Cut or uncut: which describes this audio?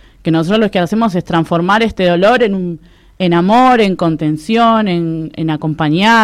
uncut